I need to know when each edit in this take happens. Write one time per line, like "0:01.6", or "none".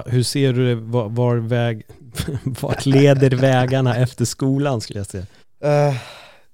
0:05.4